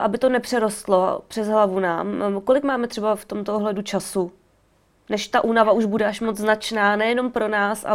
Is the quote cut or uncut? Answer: uncut